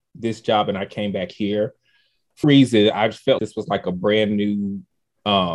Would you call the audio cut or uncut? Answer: cut